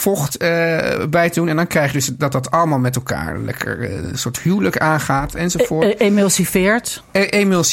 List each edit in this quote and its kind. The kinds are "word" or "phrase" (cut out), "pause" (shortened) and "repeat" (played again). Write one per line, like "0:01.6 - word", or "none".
none